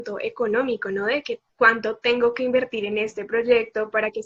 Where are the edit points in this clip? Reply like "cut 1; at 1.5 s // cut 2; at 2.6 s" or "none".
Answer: none

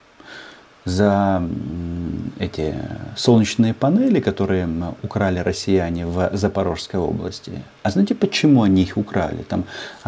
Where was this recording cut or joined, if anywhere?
none

